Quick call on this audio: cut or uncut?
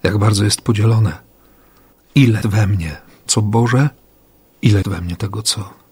cut